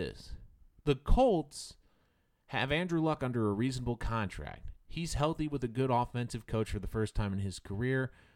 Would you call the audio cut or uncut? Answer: uncut